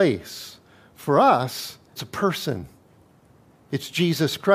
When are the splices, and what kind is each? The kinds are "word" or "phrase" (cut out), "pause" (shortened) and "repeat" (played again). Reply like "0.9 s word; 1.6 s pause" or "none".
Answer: 2.0 s word